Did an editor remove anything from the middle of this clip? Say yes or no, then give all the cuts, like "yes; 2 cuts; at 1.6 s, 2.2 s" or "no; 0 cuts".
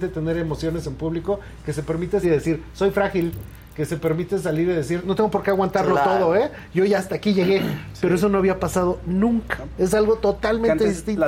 yes; 1 cut; at 2.2 s